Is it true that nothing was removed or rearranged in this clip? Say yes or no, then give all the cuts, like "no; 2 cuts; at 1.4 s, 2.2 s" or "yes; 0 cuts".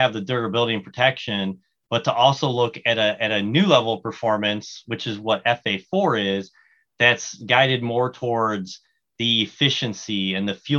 yes; 0 cuts